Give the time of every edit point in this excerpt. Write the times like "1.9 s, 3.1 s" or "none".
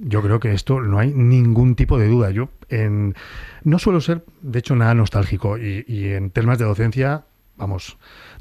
none